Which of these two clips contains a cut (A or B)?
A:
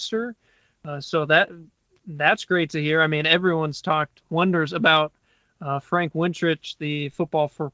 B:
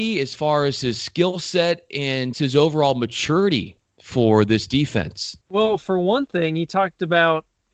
B